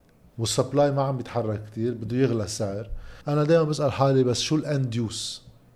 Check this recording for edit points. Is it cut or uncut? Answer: cut